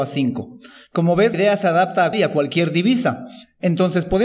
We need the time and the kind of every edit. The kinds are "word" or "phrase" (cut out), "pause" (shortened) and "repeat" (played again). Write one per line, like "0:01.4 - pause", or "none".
0:01.3 - word
0:02.1 - phrase